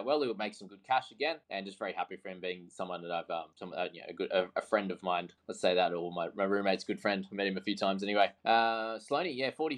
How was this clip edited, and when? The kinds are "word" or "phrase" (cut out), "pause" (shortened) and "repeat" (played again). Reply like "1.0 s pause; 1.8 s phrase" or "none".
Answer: 1.4 s pause; 3.5 s pause; 5.4 s pause; 8.4 s pause